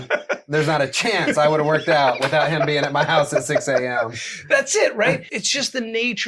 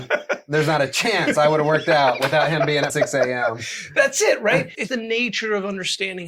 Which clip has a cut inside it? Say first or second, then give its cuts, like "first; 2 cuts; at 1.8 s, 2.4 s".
second; 2 cuts; at 2.9 s, 4.9 s